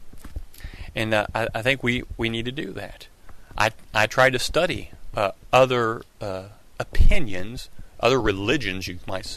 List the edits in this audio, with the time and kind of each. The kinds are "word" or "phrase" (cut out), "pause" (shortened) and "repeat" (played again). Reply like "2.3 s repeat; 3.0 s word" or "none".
none